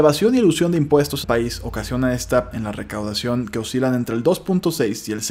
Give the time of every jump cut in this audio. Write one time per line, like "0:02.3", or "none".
0:01.2
0:02.5